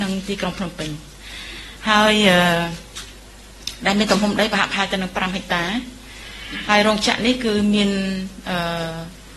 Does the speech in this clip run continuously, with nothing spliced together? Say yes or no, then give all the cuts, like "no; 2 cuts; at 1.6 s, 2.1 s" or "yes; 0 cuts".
yes; 0 cuts